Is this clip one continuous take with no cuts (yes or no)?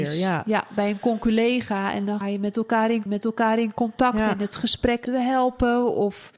no